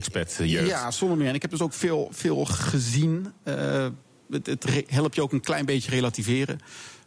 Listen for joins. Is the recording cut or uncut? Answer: uncut